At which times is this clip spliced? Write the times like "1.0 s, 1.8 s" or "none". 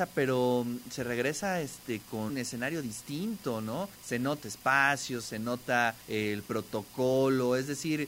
2.3 s, 4.0 s, 4.4 s, 6.0 s